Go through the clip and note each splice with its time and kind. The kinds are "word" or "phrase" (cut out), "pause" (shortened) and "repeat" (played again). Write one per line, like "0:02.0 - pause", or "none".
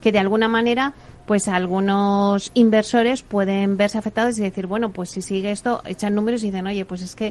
none